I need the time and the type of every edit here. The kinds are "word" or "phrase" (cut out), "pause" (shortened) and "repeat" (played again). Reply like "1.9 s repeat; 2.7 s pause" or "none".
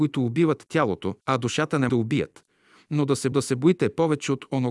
1.2 s pause; 1.9 s word; 3.3 s repeat